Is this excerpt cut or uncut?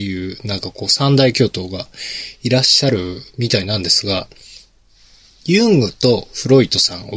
uncut